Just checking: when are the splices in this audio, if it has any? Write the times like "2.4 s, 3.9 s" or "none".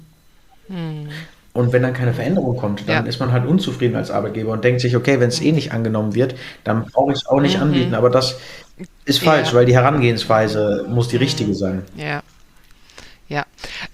none